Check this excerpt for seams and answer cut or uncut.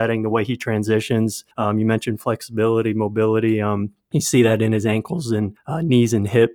cut